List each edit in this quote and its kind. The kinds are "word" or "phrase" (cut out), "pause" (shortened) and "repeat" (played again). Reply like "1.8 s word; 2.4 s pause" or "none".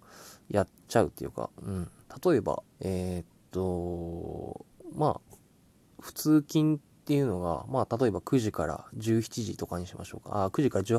2.7 s pause